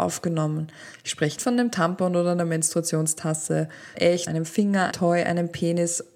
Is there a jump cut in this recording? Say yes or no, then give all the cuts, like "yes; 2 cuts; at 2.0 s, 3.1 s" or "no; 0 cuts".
yes; 4 cuts; at 1.4 s, 3.9 s, 4.3 s, 4.9 s